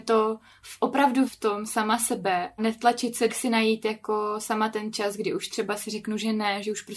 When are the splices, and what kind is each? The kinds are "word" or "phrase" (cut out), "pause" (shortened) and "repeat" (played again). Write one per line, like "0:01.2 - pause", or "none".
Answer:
0:01.2 - word
0:02.6 - word
0:03.3 - phrase